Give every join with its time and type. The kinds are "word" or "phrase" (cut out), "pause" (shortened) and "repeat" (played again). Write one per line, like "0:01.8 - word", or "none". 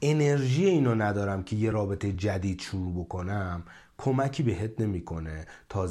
none